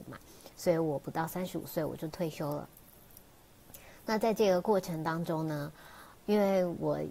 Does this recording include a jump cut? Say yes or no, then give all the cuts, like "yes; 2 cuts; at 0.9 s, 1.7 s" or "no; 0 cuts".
yes; 1 cut; at 6.1 s